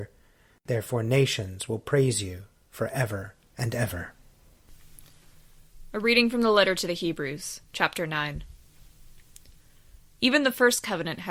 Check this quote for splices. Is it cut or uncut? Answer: uncut